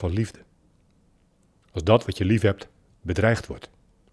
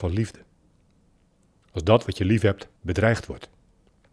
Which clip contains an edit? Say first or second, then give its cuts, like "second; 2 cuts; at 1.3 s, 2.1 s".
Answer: second; 1 cut; at 2.8 s